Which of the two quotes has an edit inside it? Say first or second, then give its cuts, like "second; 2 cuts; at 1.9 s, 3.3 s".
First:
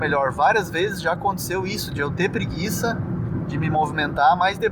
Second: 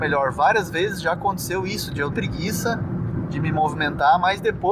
second; 1 cut; at 2.1 s